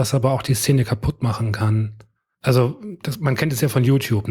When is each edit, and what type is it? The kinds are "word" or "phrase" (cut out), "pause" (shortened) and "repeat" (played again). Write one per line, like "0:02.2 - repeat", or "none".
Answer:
none